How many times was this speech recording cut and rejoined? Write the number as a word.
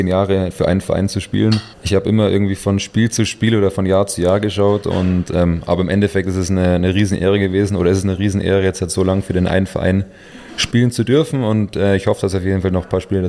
one